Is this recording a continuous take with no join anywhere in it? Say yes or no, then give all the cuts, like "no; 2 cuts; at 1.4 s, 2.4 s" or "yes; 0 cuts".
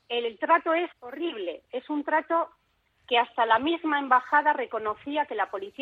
no; 1 cut; at 0.9 s